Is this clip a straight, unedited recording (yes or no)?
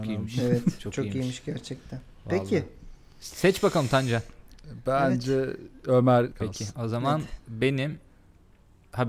no